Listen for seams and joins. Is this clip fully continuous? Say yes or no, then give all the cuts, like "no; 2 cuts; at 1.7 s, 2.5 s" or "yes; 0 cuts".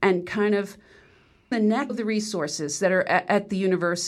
no; 2 cuts; at 1.5 s, 1.9 s